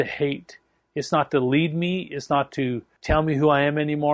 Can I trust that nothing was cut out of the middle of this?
yes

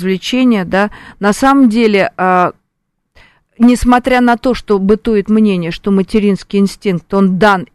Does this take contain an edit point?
no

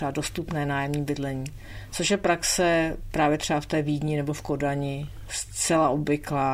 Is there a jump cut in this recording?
no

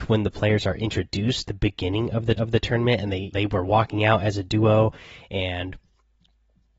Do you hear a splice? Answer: yes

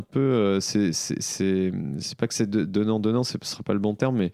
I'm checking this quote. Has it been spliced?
no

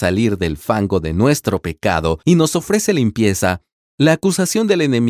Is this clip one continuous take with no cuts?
yes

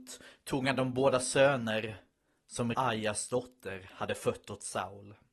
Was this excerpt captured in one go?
no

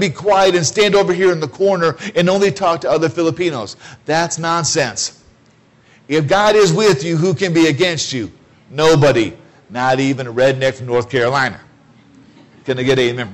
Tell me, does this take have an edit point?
no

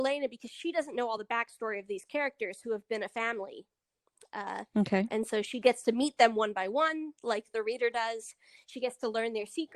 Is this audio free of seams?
yes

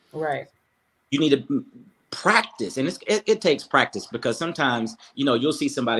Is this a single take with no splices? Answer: yes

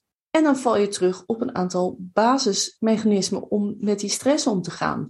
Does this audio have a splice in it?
no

